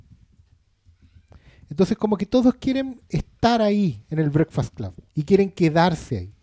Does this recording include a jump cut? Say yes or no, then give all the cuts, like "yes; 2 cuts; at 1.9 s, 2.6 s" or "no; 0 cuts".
yes; 1 cut; at 5.1 s